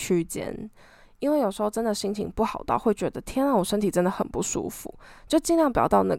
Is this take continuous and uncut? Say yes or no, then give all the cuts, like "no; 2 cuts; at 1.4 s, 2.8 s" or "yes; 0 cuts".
yes; 0 cuts